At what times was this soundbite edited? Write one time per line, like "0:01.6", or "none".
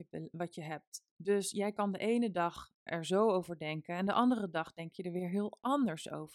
0:01.1
0:02.9